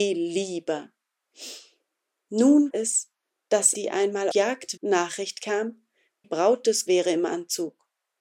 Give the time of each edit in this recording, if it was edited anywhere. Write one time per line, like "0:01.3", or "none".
0:02.7
0:03.7
0:04.3
0:04.8
0:06.2
0:06.9